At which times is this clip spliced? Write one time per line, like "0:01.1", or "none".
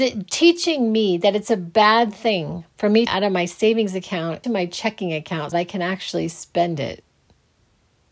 0:03.1
0:04.4
0:05.5